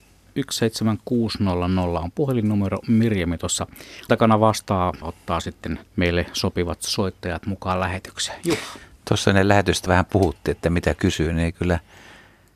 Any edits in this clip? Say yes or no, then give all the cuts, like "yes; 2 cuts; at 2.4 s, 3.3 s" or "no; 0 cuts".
yes; 5 cuts; at 4.1 s, 5.0 s, 5.9 s, 9.9 s, 11.0 s